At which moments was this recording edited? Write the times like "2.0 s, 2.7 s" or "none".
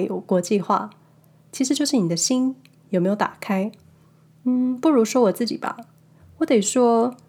none